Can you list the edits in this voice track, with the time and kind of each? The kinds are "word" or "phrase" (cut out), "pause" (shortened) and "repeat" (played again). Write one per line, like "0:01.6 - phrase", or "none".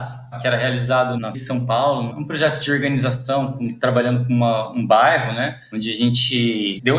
0:01.3 - word